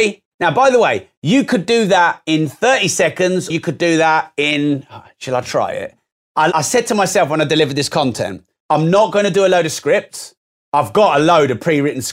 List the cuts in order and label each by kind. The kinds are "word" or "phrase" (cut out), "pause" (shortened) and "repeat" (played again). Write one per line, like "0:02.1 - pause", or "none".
0:03.5 - word
0:06.5 - word